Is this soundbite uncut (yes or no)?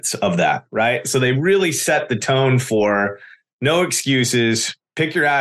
yes